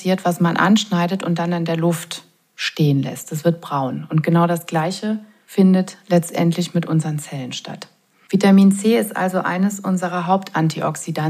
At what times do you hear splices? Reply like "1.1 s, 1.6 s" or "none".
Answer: none